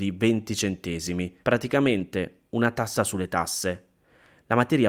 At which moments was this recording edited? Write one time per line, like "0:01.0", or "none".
0:01.4